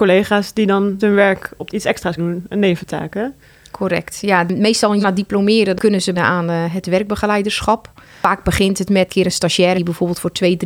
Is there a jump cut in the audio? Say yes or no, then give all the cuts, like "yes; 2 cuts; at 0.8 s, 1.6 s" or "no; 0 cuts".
yes; 7 cuts; at 1.0 s, 1.7 s, 2.2 s, 5.0 s, 6.1 s, 9.1 s, 9.7 s